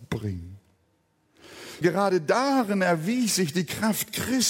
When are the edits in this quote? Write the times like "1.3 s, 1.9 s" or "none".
1.8 s